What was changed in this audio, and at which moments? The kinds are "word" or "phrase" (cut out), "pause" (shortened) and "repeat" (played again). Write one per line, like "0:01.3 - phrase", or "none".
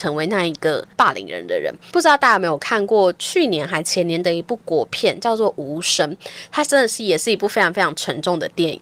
0:00.9 - pause